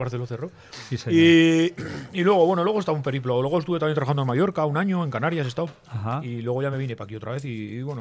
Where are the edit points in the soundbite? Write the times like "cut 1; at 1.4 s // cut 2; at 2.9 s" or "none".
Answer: none